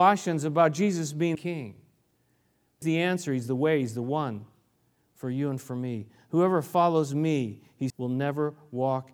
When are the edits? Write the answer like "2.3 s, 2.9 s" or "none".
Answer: 1.3 s, 2.8 s, 7.9 s